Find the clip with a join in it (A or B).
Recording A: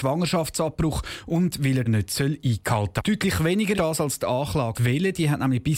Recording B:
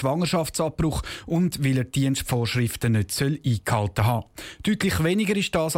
A